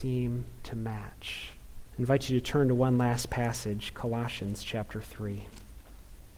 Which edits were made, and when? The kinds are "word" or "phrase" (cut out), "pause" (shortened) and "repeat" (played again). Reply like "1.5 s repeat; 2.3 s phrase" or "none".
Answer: 1.9 s pause